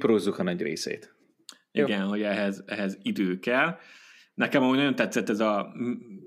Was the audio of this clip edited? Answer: no; 0 cuts

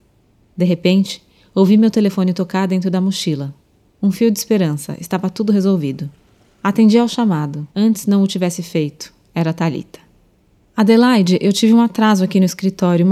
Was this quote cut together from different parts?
yes; 1 cut; at 7.7 s

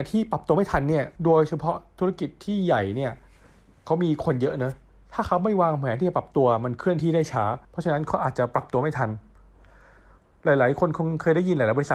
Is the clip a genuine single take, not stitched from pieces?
no; 2 cuts; at 1.2 s, 7.6 s

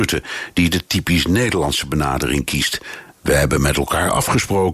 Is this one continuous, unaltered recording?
yes; 0 cuts

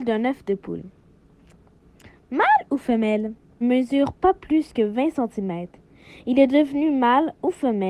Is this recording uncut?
no; 1 cut; at 3.6 s

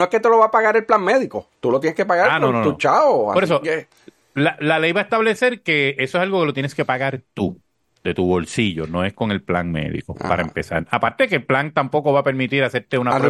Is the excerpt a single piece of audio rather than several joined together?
yes; 0 cuts

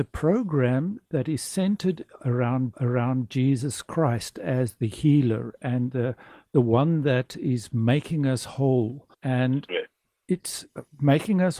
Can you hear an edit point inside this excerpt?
yes; 2 cuts; at 2.7 s, 9.1 s

